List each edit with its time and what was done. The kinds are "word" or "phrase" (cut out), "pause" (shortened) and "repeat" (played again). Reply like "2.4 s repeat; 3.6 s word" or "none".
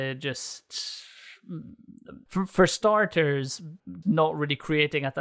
4.0 s word